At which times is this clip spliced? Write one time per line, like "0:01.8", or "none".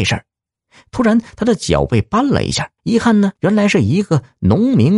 0:02.8
0:03.4